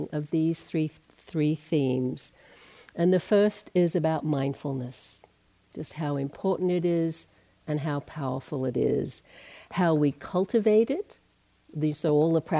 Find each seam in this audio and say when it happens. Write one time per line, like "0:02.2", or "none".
none